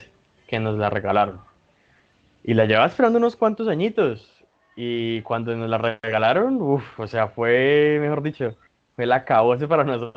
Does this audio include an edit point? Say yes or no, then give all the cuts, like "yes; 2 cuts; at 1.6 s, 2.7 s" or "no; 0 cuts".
no; 0 cuts